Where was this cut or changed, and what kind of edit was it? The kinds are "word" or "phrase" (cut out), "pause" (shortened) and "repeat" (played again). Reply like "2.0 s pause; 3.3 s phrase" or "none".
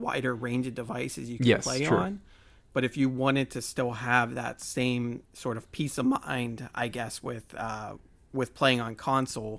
none